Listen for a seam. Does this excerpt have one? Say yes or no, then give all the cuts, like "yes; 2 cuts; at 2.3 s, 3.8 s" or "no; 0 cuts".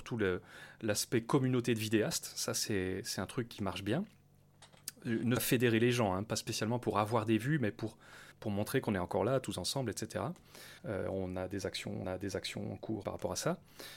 yes; 5 cuts; at 5.4 s, 8.3 s, 10.8 s, 12.0 s, 13.0 s